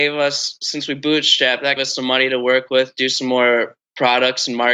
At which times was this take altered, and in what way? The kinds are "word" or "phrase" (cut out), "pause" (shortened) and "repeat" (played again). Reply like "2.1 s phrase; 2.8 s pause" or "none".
1.8 s phrase